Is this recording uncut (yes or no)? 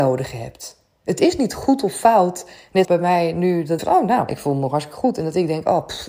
no